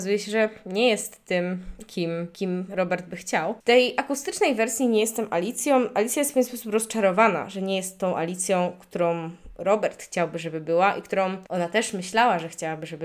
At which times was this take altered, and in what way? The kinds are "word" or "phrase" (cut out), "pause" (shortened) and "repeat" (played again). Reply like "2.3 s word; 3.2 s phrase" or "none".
11.5 s pause